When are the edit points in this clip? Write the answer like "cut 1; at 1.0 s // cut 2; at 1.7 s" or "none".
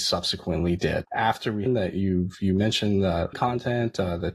cut 1; at 1.1 s // cut 2; at 1.7 s // cut 3; at 3.3 s

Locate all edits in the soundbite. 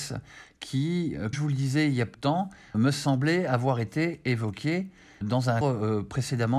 cut 1; at 1.3 s // cut 2; at 2.1 s // cut 3; at 2.7 s // cut 4; at 5.2 s // cut 5; at 5.6 s

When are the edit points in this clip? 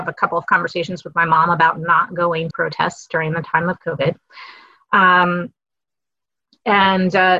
cut 1; at 2.5 s

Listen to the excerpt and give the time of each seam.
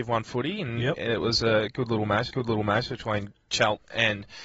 cut 1; at 2.3 s

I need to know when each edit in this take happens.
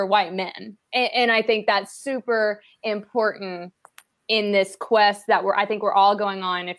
none

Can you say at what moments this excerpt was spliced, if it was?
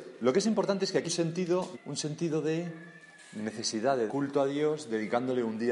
cut 1; at 1.0 s // cut 2; at 1.7 s // cut 3; at 4.1 s

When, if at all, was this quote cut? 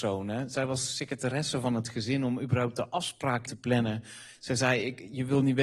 cut 1; at 3.5 s

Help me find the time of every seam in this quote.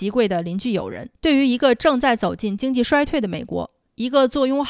cut 1; at 1.1 s

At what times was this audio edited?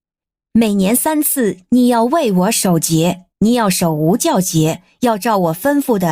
cut 1; at 3.3 s

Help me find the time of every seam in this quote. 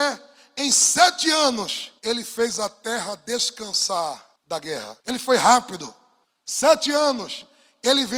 cut 1; at 2.0 s // cut 2; at 4.4 s // cut 3; at 5.0 s // cut 4; at 6.2 s

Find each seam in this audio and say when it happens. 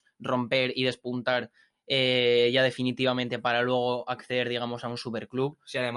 none

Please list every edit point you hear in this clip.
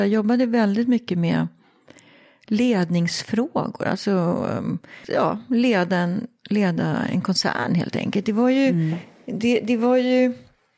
none

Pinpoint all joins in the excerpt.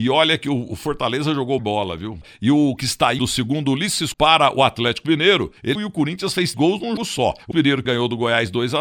cut 1; at 1.6 s // cut 2; at 2.8 s // cut 3; at 3.2 s // cut 4; at 4.1 s // cut 5; at 5.8 s // cut 6; at 6.5 s // cut 7; at 7.0 s // cut 8; at 7.5 s // cut 9; at 7.8 s

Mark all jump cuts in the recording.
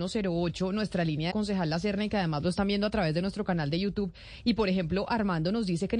cut 1; at 1.3 s

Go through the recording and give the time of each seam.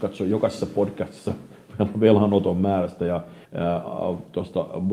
cut 1; at 3.4 s

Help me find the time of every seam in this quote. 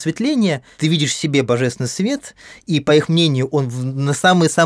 none

